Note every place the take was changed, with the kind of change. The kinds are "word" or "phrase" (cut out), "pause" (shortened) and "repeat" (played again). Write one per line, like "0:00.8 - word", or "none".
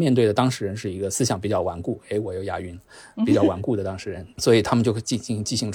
none